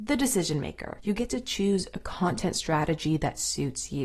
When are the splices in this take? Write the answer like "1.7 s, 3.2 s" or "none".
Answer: none